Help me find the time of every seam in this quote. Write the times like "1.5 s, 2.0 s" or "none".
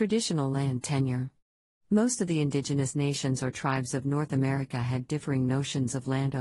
none